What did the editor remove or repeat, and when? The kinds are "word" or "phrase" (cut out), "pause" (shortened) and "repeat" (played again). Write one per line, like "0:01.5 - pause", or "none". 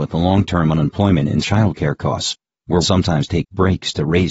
0:01.4 - word
0:02.8 - word